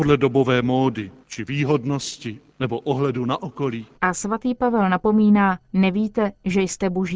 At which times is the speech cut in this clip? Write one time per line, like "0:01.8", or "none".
0:01.2
0:02.5
0:03.9
0:05.6